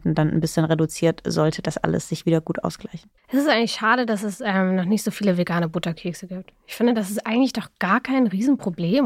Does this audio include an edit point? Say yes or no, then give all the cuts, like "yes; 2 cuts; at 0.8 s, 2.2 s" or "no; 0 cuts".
yes; 1 cut; at 3.2 s